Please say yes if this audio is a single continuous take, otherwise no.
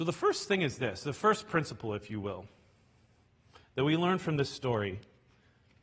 yes